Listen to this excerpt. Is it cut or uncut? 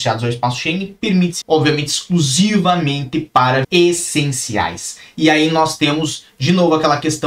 cut